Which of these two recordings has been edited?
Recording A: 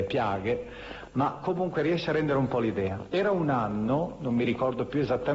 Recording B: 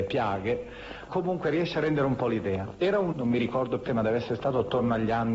B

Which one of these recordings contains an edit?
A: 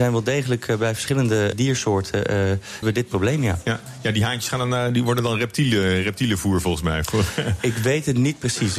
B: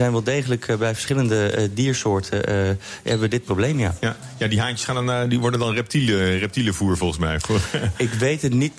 A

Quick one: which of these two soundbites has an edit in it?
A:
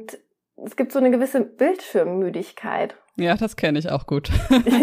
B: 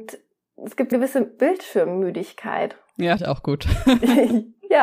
B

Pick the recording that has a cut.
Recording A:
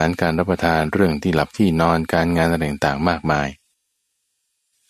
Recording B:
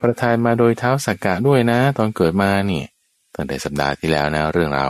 B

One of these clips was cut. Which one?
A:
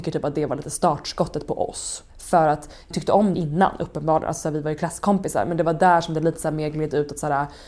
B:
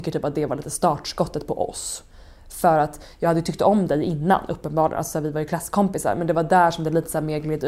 A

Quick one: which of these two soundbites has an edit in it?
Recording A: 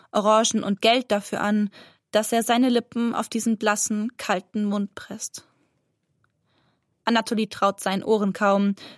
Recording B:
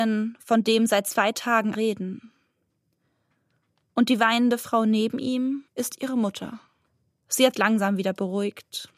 B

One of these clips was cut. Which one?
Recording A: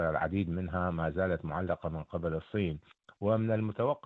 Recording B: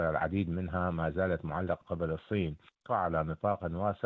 B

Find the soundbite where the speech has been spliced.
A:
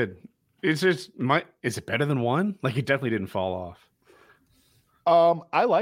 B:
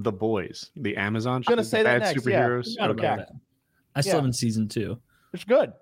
B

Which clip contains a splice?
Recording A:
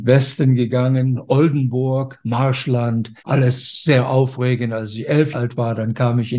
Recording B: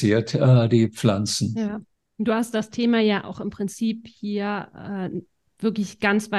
A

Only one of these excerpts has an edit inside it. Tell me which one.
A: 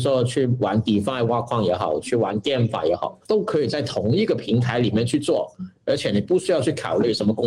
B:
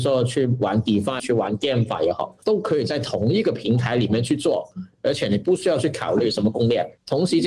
B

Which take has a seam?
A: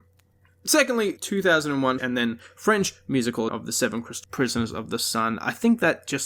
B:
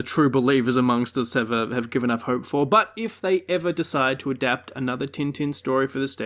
A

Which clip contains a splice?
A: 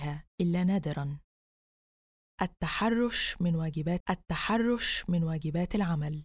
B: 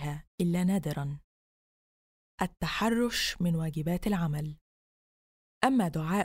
A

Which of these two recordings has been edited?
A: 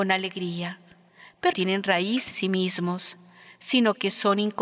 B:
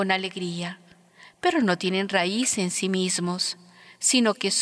A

